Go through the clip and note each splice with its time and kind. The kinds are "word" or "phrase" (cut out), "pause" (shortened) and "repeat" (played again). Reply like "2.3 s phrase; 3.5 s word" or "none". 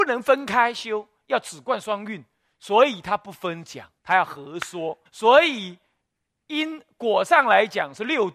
4.0 s pause; 5.1 s pause